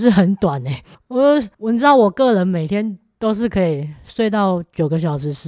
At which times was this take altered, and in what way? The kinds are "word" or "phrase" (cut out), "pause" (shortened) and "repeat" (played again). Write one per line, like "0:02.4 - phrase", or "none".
0:01.5 - pause